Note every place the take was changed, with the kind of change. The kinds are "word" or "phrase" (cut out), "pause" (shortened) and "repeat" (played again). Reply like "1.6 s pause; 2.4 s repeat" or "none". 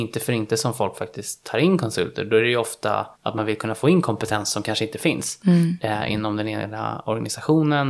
3.1 s pause